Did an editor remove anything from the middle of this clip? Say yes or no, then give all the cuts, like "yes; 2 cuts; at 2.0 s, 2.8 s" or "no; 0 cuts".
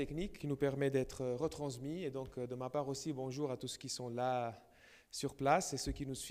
no; 0 cuts